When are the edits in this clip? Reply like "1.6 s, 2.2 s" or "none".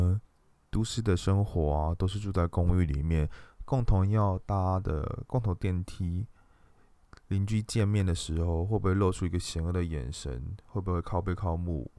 none

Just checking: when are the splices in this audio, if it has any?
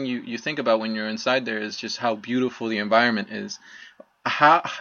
none

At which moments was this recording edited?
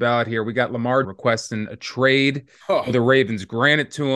1.0 s

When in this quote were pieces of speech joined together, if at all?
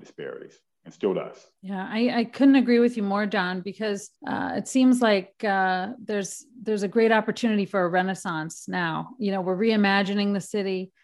1.6 s, 4.2 s

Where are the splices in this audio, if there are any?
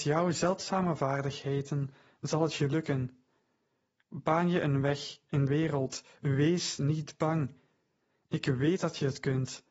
5.5 s

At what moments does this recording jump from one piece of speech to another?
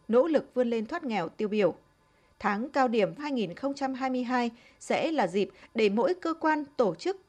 3.2 s

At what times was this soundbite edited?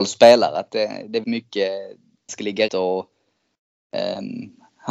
1.2 s, 2.3 s, 2.7 s

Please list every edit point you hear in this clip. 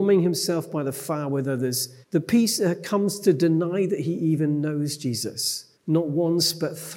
2.0 s, 5.7 s

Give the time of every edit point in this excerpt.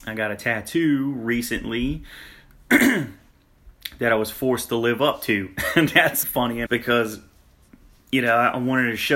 6.2 s, 6.7 s

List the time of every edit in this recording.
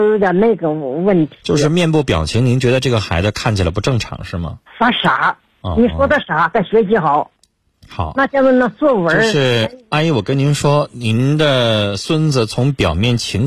4.7 s, 5.5 s

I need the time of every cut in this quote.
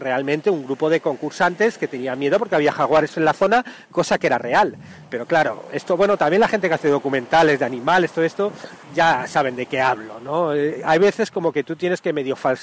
8.8 s

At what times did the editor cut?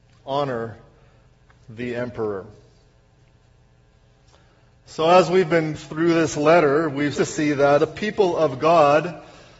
5.8 s, 7.2 s, 7.8 s

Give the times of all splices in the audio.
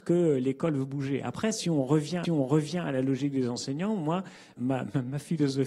2.2 s, 4.6 s

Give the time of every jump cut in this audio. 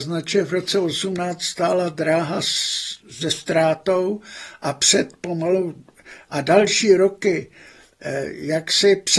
3.0 s

